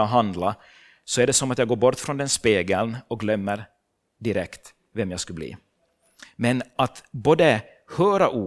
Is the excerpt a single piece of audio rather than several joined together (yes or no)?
yes